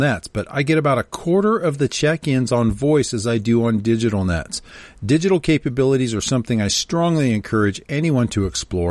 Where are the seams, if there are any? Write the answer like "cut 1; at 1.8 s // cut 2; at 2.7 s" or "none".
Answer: none